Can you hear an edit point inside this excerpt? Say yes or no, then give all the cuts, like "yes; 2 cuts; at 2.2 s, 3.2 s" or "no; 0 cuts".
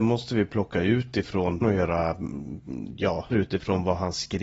yes; 2 cuts; at 1.6 s, 3.3 s